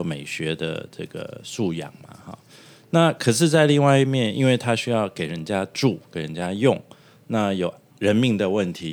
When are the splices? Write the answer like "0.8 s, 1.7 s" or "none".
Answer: none